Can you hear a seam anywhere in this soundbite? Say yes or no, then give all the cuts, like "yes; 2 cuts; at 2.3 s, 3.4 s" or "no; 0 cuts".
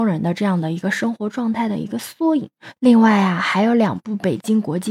yes; 1 cut; at 2.8 s